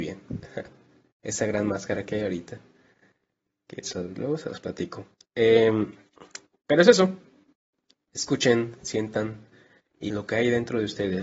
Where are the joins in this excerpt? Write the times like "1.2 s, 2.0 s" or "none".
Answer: 3.8 s, 5.2 s, 10.1 s